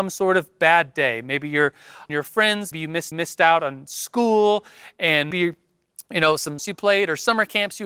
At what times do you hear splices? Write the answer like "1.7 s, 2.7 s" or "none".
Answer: 2.1 s, 2.7 s, 3.1 s, 5.3 s, 6.6 s

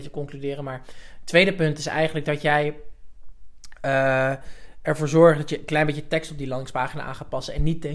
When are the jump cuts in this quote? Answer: none

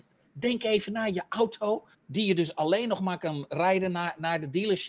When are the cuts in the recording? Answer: 1.9 s

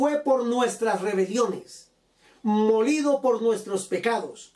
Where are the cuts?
none

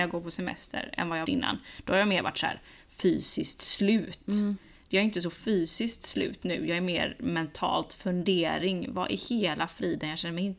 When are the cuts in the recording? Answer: 1.2 s

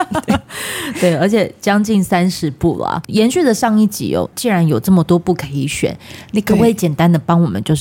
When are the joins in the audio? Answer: none

